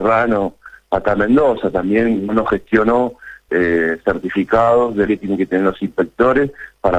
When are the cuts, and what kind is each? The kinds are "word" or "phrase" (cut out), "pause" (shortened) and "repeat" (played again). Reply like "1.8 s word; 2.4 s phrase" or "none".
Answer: 2.3 s word; 3.5 s phrase; 5.1 s phrase